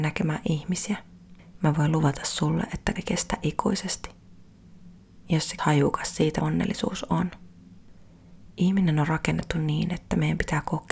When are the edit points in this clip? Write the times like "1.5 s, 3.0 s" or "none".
3.0 s, 5.6 s, 6.4 s